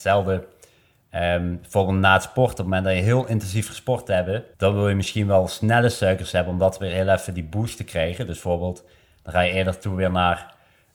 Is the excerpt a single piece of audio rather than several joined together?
no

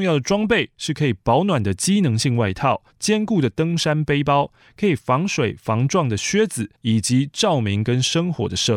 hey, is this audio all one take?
no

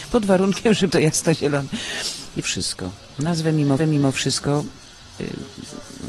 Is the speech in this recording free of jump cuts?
no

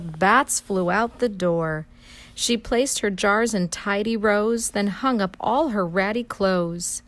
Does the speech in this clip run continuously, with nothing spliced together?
yes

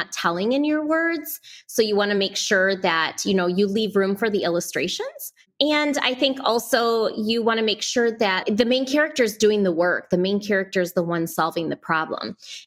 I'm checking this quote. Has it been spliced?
no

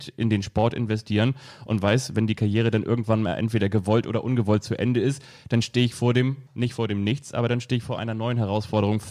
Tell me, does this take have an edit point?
yes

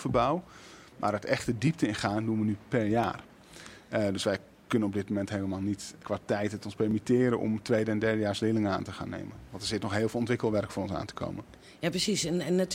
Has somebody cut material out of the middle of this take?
yes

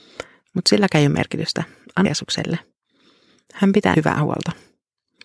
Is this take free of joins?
no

